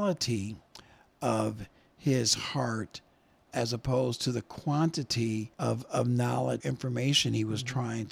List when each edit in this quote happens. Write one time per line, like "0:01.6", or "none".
0:03.5
0:05.5
0:06.6